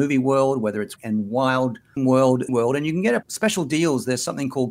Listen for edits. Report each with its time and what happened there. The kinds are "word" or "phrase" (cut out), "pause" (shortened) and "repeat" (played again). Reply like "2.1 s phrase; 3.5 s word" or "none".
1.0 s word; 2.0 s word; 2.5 s word; 3.2 s word